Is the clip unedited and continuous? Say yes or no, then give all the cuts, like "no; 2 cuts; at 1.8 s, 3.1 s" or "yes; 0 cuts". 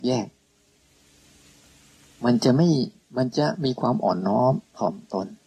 yes; 0 cuts